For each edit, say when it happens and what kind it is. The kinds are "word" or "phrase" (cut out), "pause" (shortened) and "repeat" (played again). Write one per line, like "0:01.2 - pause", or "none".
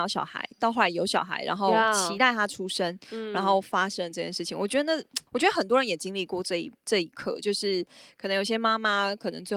0:05.3 - pause